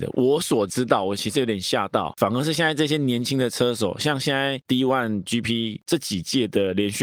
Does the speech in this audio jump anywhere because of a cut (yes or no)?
no